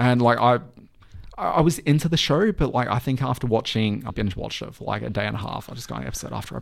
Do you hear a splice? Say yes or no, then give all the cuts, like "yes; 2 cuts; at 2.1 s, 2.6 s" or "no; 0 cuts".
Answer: yes; 1 cut; at 4.1 s